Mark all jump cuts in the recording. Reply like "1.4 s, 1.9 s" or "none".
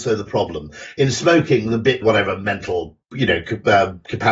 2.0 s, 3.0 s